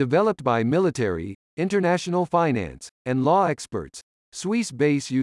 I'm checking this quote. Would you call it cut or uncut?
uncut